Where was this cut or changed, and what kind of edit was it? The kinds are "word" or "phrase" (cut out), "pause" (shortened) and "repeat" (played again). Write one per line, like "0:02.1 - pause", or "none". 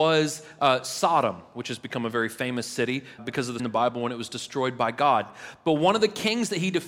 0:03.2 - word
0:03.6 - word

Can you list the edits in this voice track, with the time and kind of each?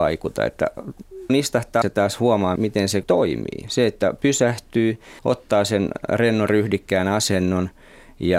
0:01.3 - phrase
0:01.8 - word
0:02.6 - word
0:03.0 - word
0:05.2 - pause

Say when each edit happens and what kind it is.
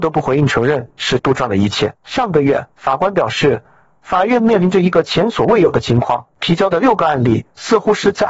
0:01.2 - word
0:02.0 - pause
0:02.7 - pause
0:06.3 - pause

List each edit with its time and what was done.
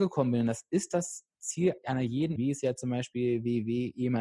0:02.4 - word

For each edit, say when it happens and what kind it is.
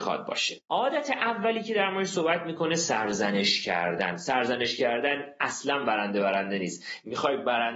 none

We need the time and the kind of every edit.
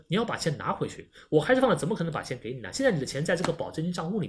none

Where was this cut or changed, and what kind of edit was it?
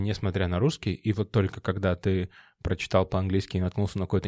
none

